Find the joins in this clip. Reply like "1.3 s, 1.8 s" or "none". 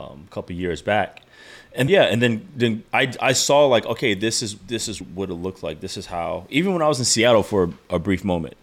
1.9 s, 2.9 s, 5.0 s